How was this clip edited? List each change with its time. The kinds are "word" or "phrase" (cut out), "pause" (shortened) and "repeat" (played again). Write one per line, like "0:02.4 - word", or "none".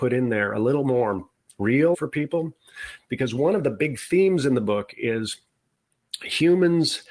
0:01.9 - phrase